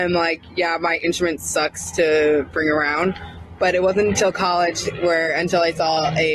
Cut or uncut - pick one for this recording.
uncut